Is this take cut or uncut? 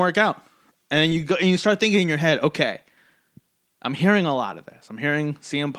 uncut